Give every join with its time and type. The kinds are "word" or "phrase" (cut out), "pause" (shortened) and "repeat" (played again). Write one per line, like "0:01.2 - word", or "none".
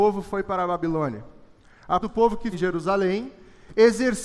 0:02.0 - word
0:02.5 - word